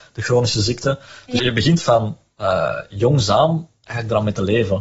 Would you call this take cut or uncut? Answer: cut